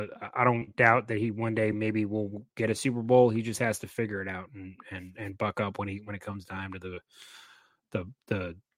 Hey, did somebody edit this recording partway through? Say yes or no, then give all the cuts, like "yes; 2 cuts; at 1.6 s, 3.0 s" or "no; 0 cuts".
no; 0 cuts